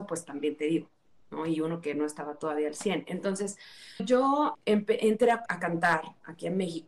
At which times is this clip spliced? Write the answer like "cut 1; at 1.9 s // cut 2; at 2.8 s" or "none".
cut 1; at 4.0 s // cut 2; at 4.5 s // cut 3; at 5.5 s